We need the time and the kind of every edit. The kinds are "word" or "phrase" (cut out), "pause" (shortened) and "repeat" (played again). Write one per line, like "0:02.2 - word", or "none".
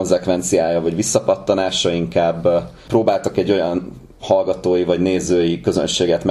0:02.8 - pause
0:04.1 - pause

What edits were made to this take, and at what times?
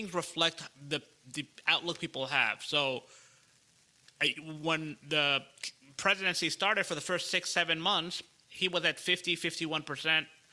none

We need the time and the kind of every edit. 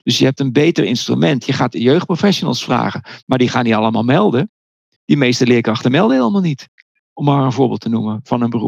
none

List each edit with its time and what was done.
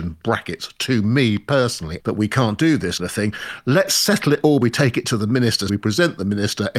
0:02.0 - word
0:03.0 - word
0:04.6 - word
0:05.7 - word

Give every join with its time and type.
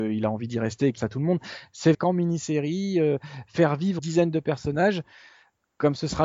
0:01.0 - word
0:01.9 - word
0:04.0 - word

